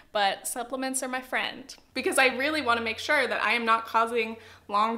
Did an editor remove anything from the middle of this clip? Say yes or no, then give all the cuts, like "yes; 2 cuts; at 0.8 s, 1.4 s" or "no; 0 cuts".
no; 0 cuts